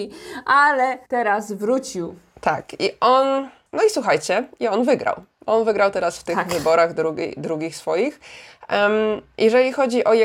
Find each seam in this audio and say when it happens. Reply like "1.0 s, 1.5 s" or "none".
1.0 s